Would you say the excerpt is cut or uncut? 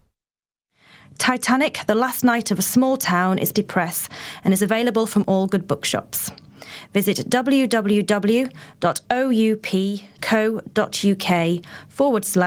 cut